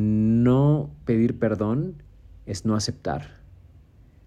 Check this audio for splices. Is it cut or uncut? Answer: uncut